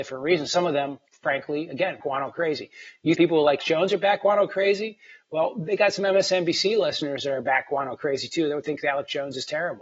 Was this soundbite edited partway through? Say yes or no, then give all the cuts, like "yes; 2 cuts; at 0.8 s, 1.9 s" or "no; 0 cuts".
yes; 4 cuts; at 1.1 s, 2.0 s, 3.1 s, 3.6 s